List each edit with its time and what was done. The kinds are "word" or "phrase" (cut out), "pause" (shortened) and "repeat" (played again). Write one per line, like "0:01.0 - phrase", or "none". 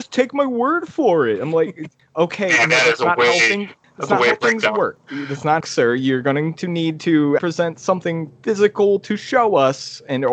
0:05.6 - phrase
0:07.4 - word